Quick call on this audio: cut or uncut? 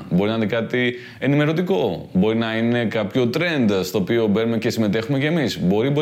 uncut